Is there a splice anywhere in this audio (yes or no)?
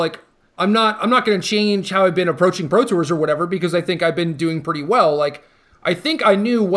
no